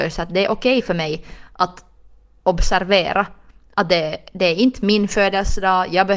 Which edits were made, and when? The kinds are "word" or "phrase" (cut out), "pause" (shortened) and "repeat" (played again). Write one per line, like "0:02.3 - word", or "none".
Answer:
none